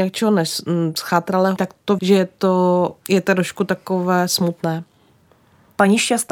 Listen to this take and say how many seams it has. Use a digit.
3